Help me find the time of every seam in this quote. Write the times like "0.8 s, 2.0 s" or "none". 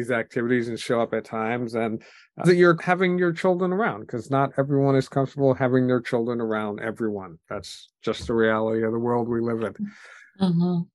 2.4 s, 2.8 s, 7.4 s